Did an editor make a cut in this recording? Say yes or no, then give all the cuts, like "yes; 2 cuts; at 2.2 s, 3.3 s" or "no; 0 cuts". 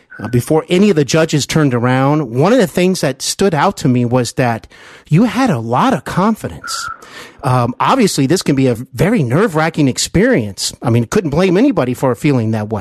no; 0 cuts